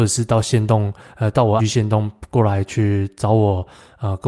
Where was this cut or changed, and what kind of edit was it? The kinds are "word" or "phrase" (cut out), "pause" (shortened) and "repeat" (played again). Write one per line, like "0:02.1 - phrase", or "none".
0:01.6 - word